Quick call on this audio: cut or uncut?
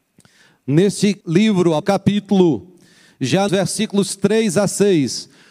cut